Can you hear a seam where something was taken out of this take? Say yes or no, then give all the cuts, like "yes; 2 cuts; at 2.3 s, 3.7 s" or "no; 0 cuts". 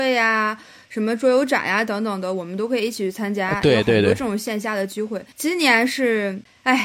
yes; 1 cut; at 5.3 s